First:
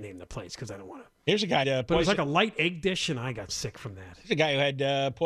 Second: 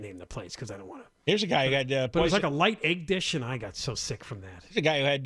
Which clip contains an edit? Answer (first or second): first